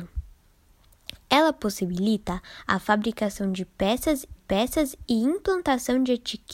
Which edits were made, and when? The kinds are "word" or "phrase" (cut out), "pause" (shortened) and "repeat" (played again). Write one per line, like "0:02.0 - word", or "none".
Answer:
0:04.4 - repeat